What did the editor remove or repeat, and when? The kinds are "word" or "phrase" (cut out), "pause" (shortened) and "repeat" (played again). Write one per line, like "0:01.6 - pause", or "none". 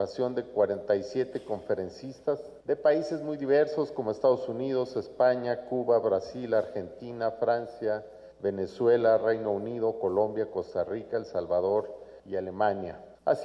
0:02.6 - pause
0:08.3 - pause
0:12.2 - pause